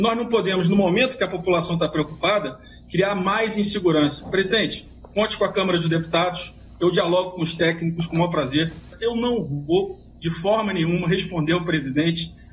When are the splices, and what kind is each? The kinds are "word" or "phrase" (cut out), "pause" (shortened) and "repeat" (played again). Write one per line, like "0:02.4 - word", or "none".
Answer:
none